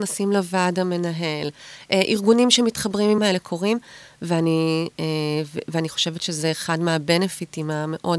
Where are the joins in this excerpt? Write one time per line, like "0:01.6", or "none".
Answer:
0:03.2